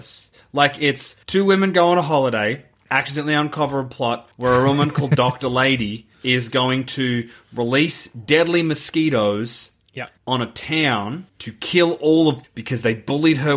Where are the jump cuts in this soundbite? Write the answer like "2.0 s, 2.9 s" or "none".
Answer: 1.2 s, 4.3 s, 6.1 s, 10.2 s, 11.3 s, 12.4 s